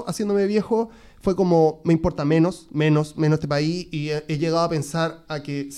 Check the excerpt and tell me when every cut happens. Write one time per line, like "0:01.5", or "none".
none